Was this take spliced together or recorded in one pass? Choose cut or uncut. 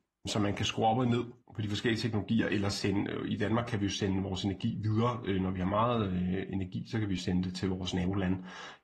uncut